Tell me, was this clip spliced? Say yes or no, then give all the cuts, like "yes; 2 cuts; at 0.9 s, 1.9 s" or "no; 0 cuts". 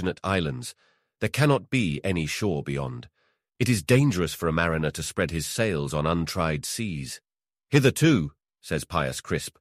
no; 0 cuts